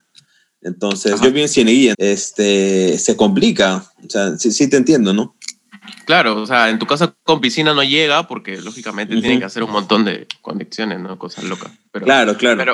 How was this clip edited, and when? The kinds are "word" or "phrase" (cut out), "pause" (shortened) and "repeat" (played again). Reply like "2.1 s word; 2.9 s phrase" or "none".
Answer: 1.9 s word